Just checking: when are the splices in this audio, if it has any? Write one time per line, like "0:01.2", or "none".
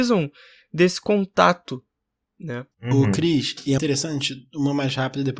0:02.7
0:03.8

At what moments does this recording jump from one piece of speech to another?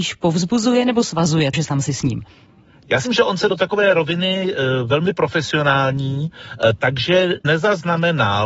0:01.5
0:03.1
0:03.5
0:07.4

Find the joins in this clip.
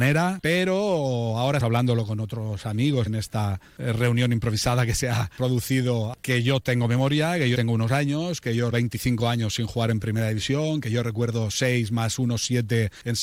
0:01.6
0:03.1
0:07.5
0:08.7

